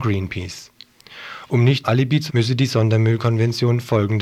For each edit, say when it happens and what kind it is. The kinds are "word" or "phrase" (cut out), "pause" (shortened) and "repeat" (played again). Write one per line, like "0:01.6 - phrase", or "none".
0:01.8 - word
0:02.3 - word